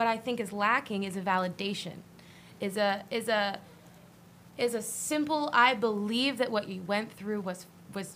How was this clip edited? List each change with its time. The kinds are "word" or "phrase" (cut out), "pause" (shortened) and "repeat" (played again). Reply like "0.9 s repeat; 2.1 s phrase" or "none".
none

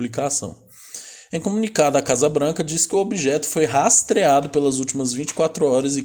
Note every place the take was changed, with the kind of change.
none

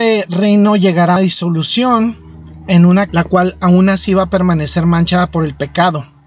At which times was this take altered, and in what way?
1.2 s word; 3.1 s phrase

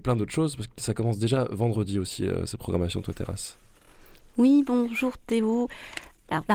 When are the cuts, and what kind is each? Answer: none

